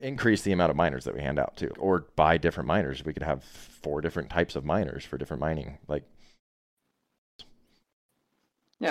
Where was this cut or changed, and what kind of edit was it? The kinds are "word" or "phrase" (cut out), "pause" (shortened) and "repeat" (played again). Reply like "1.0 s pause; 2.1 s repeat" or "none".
1.7 s word